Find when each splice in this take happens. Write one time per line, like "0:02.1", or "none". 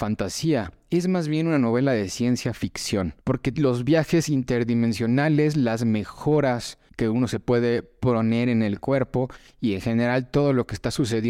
0:03.2
0:06.9